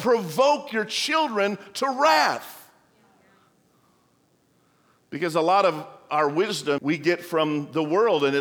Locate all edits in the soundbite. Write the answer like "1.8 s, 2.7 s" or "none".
6.8 s